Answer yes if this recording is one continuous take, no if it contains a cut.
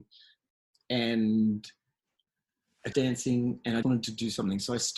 no